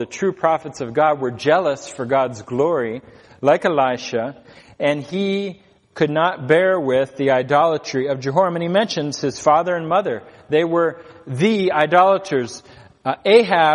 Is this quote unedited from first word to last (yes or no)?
yes